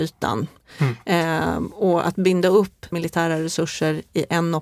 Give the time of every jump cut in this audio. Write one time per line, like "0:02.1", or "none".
0:02.9